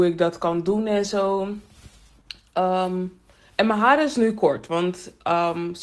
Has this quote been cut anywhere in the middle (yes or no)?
no